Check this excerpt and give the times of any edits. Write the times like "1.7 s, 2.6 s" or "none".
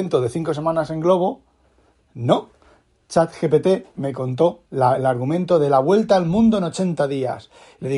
none